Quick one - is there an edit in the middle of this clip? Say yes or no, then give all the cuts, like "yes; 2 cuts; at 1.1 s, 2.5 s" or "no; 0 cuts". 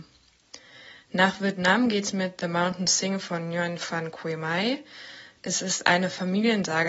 no; 0 cuts